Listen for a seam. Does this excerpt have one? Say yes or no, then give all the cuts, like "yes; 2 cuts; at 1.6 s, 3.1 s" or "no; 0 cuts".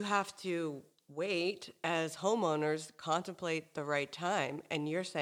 no; 0 cuts